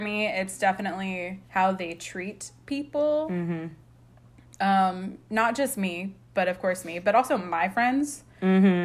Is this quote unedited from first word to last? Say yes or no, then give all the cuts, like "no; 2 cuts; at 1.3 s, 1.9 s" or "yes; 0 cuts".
no; 1 cut; at 1.5 s